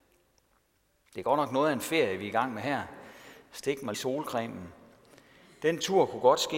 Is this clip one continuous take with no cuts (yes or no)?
no